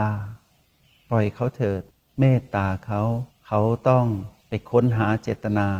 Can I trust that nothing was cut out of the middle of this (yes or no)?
no